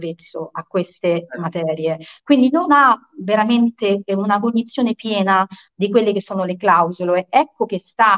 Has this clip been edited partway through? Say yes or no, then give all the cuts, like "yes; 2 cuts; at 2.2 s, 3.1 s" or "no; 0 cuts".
no; 0 cuts